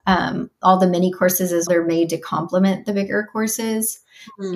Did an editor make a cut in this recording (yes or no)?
yes